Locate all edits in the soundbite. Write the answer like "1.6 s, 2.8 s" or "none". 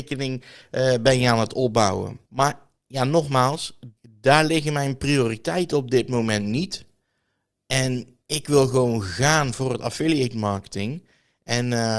2.3 s, 4.0 s, 8.2 s